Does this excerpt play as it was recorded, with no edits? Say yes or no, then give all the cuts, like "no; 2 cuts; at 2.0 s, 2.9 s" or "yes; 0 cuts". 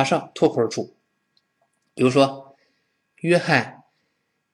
yes; 0 cuts